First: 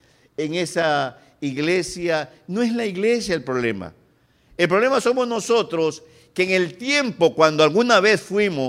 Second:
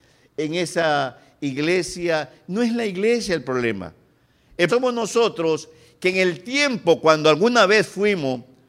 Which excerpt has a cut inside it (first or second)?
second